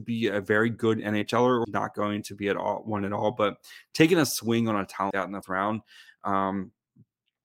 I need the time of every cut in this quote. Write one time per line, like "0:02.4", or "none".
0:01.6
0:05.1
0:05.4